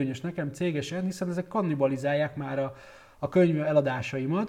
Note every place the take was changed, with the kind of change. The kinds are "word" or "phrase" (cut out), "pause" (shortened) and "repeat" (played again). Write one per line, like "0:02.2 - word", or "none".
none